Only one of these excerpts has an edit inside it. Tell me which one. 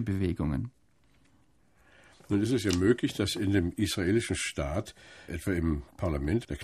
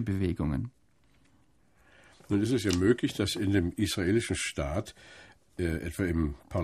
first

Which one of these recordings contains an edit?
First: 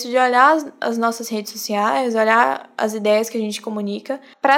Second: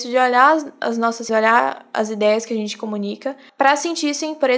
second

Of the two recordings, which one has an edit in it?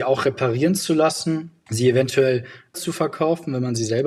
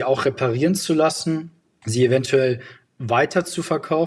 first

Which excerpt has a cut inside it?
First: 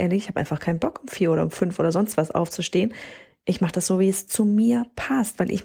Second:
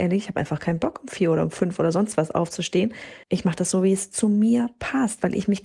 second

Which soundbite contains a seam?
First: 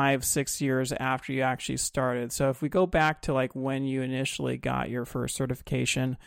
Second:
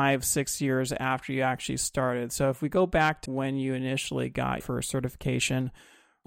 second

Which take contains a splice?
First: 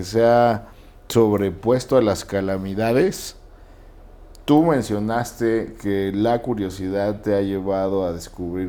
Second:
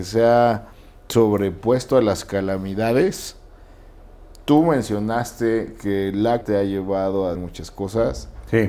second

